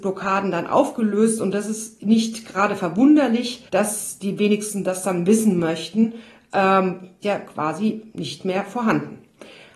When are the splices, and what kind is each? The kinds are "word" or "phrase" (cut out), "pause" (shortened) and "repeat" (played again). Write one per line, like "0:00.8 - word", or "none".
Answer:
0:03.7 - pause
0:07.2 - phrase